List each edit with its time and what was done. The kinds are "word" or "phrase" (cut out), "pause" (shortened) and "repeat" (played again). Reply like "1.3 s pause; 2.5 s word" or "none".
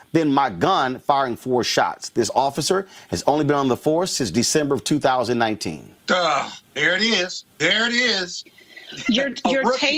6.0 s pause; 7.5 s pause